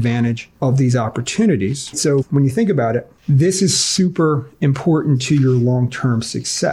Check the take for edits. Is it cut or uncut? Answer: cut